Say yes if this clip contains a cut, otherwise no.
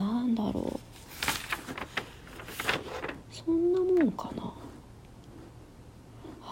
yes